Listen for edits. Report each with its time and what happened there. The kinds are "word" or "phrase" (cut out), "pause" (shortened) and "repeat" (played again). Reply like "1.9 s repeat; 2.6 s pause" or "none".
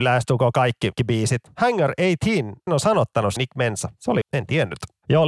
1.0 s word; 2.7 s word; 3.4 s word; 4.2 s word

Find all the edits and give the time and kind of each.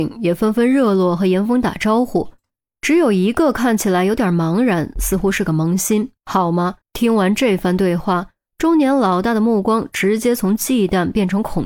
6.2 s pause; 6.8 s pause

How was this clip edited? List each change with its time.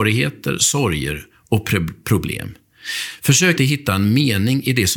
3.6 s word

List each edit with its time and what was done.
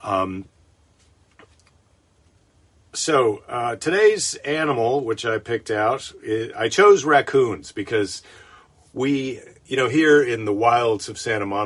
9.6 s pause

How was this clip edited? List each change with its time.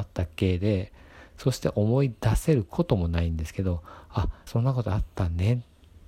4.5 s phrase

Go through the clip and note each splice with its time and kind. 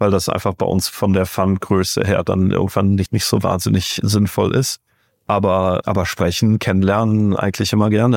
3.1 s word; 5.8 s word

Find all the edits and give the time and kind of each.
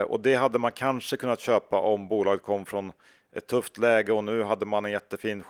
none

